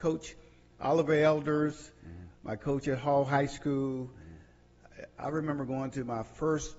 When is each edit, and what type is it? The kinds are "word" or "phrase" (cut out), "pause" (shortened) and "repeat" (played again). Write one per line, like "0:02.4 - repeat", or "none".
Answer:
none